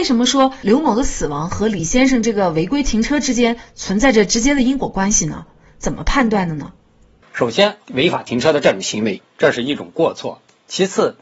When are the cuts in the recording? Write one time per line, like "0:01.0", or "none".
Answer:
none